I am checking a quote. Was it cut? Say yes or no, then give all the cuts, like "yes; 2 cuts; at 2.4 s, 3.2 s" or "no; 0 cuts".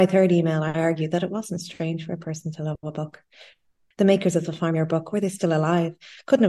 no; 0 cuts